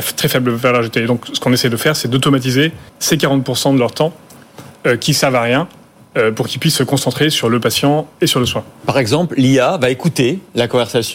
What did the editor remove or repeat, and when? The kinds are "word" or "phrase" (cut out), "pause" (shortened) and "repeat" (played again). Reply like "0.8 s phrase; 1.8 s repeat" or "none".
2.9 s pause